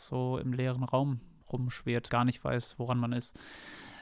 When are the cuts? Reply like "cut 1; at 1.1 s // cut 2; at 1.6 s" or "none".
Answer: cut 1; at 2.1 s